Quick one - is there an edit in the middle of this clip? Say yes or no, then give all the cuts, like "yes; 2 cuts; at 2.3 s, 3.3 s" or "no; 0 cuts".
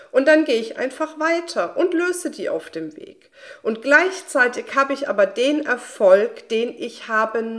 no; 0 cuts